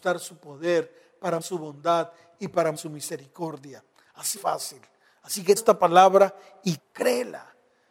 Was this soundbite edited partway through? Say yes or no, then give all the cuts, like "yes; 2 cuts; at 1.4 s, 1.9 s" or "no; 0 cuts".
yes; 5 cuts; at 1.4 s, 2.8 s, 4.4 s, 5.6 s, 6.8 s